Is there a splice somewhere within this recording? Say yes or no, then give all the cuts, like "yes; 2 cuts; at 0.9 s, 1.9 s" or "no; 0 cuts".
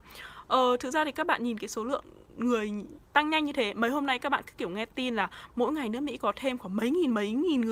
yes; 1 cut; at 3.1 s